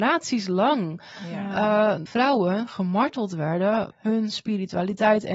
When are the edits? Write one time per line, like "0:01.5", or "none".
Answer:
0:02.1
0:03.9